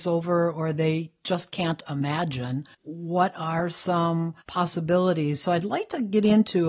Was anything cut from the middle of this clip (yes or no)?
yes